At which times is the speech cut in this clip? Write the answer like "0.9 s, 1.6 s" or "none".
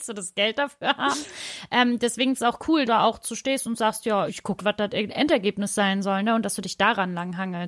2.4 s, 2.9 s, 4.3 s, 4.6 s